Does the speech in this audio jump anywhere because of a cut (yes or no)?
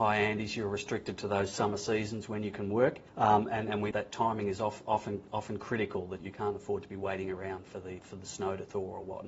yes